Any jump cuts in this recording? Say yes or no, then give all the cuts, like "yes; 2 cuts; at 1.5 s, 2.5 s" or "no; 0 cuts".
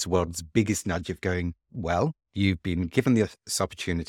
yes; 1 cut; at 1.6 s